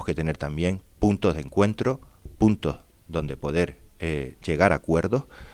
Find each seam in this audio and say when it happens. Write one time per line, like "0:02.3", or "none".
none